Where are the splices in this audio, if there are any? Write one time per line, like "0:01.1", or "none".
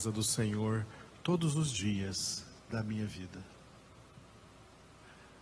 0:02.6